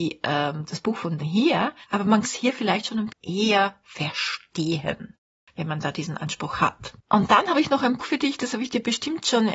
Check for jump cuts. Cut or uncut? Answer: cut